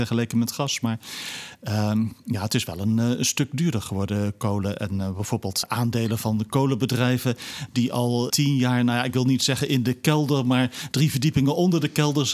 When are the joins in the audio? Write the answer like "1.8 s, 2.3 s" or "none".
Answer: 5.6 s, 8.3 s